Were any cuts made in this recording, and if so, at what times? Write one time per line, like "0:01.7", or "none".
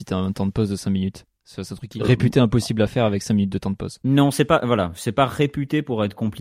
0:02.0